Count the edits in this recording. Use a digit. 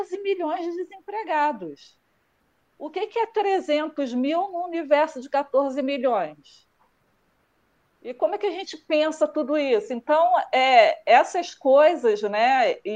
0